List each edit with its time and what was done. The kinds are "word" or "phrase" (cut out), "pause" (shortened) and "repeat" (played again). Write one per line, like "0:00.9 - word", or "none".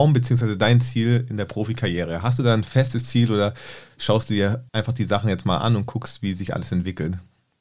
0:04.7 - pause